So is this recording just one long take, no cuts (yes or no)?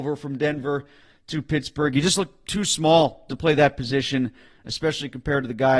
yes